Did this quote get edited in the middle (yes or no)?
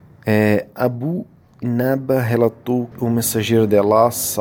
yes